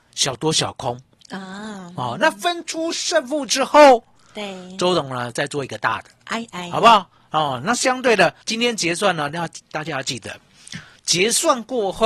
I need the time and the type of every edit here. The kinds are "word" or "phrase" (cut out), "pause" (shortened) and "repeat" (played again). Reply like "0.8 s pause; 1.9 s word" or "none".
8.4 s pause

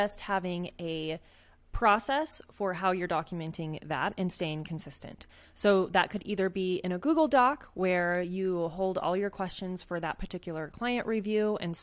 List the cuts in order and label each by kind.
none

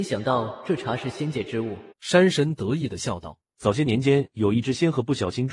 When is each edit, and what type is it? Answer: 1.9 s pause; 3.5 s pause

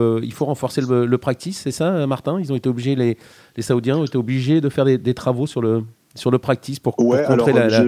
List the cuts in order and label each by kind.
none

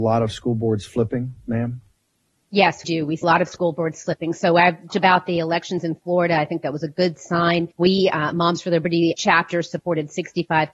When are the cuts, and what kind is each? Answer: 2.8 s word; 3.2 s word; 4.9 s word; 7.7 s pause; 9.2 s word

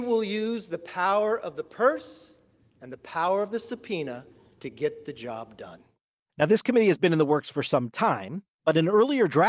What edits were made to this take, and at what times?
none

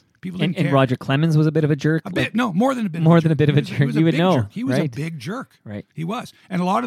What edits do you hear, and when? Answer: none

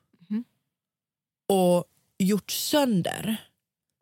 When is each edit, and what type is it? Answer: none

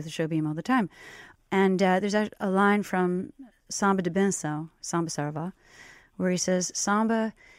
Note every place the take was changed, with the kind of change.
none

